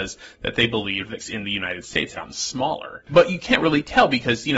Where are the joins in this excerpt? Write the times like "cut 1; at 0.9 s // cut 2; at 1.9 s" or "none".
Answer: cut 1; at 1.2 s // cut 2; at 2.1 s